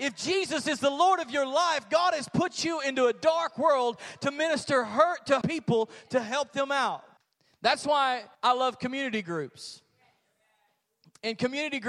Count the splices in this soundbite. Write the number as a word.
three